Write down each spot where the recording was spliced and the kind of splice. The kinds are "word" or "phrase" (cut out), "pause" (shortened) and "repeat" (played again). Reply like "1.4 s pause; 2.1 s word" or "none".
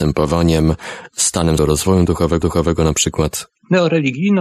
1.6 s word; 2.4 s repeat